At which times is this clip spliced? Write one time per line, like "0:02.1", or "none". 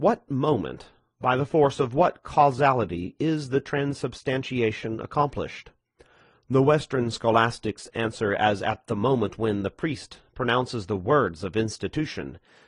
none